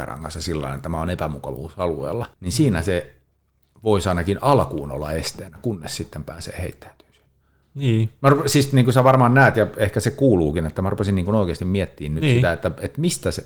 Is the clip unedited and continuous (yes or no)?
no